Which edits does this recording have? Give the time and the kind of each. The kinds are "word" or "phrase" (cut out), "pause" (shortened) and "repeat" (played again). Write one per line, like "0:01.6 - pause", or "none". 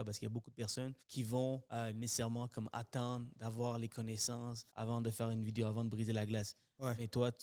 0:01.0 - pause
0:01.6 - pause
0:04.7 - pause